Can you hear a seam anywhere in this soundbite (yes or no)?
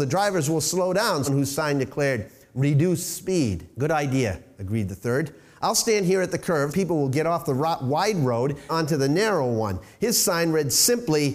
yes